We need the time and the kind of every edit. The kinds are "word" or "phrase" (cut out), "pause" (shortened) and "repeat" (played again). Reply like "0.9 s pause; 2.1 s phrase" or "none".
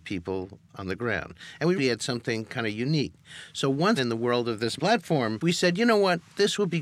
1.8 s word; 4.0 s word; 4.8 s word; 5.4 s word